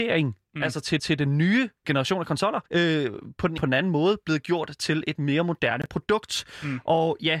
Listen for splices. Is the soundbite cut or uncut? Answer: cut